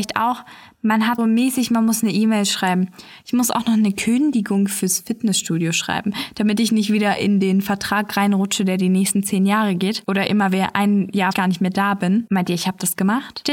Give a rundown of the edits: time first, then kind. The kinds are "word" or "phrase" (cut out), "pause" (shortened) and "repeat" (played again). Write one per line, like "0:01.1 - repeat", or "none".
0:01.2 - word
0:11.3 - phrase